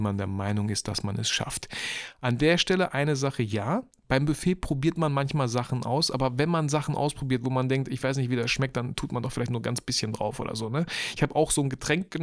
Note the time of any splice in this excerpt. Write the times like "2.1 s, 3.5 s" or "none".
none